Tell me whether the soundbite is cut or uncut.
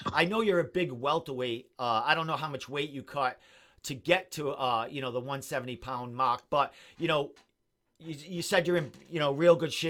uncut